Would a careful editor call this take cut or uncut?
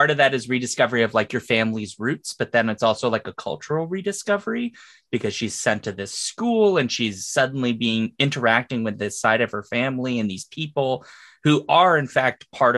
uncut